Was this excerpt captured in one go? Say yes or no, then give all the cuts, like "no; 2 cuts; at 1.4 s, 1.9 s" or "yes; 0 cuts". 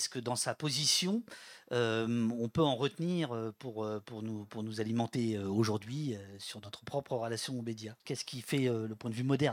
no; 1 cut; at 8.0 s